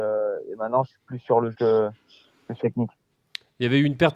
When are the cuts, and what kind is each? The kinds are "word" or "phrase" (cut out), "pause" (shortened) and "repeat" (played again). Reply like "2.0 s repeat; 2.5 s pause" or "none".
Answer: 1.0 s word; 1.5 s word; 2.6 s word